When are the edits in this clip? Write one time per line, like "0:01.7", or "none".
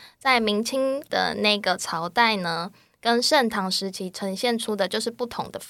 none